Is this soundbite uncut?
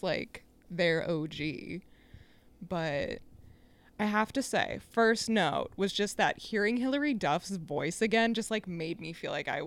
yes; 0 cuts

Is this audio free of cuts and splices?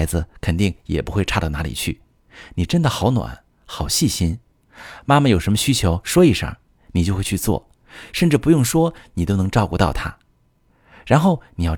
yes; 0 cuts

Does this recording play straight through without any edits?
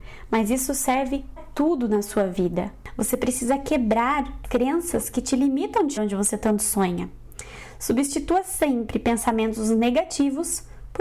no; 3 cuts; at 1.4 s, 4.4 s, 6.0 s

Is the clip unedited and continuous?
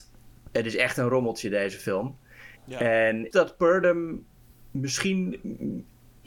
no; 2 cuts; at 2.6 s, 3.3 s

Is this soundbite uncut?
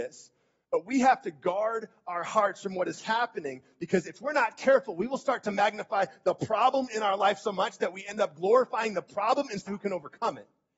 no; 1 cut; at 9.7 s

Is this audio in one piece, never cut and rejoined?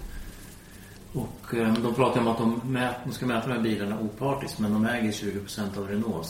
yes; 0 cuts

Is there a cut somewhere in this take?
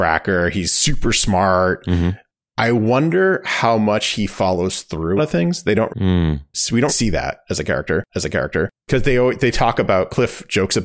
yes; 4 cuts; at 5.2 s, 5.9 s, 6.9 s, 8.1 s

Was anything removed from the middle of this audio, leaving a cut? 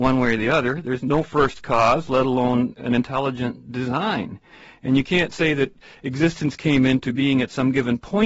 no; 0 cuts

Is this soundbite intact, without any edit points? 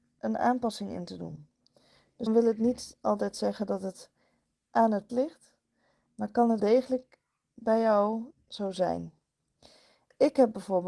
no; 4 cuts; at 2.3 s, 5.1 s, 6.6 s, 8.3 s

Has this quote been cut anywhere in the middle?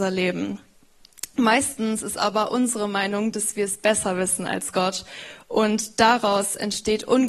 no; 0 cuts

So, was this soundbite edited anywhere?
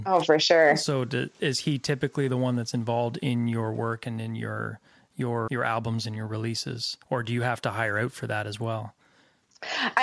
yes; 2 cuts; at 5.5 s, 7.0 s

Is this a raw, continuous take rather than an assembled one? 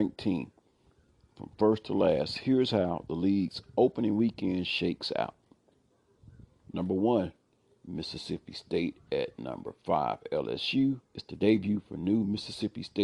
no; 1 cut; at 11.1 s

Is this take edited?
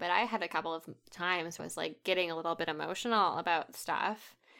yes; 1 cut; at 1.6 s

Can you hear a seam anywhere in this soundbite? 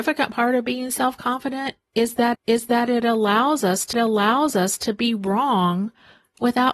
yes; 2 cuts; at 2.3 s, 3.9 s

